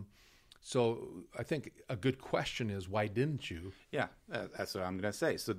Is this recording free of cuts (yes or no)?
yes